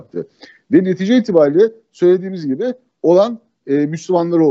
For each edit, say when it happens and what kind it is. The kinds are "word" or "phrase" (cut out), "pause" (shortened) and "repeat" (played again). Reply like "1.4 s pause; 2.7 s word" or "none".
none